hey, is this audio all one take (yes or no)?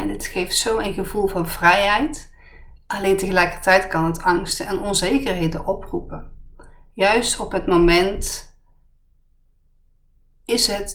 yes